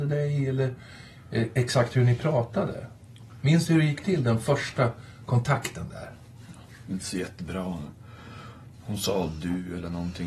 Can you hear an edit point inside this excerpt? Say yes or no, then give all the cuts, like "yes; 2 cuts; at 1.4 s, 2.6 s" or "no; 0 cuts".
no; 0 cuts